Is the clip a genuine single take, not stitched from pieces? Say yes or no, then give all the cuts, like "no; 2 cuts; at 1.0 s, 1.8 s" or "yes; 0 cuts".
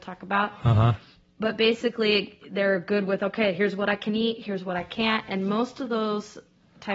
yes; 0 cuts